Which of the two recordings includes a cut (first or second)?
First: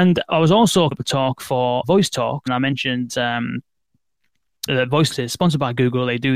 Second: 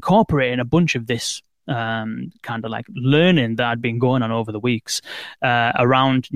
first